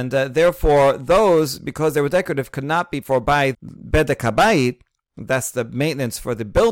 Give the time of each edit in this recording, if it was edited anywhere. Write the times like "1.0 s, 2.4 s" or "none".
3.0 s, 3.5 s